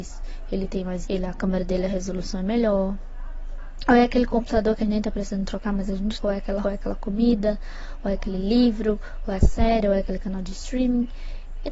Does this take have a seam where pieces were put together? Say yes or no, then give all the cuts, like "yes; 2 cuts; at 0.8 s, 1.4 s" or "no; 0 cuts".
yes; 5 cuts; at 1.0 s, 4.8 s, 6.2 s, 6.6 s, 9.4 s